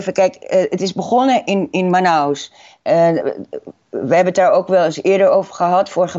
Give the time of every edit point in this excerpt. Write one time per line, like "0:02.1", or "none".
none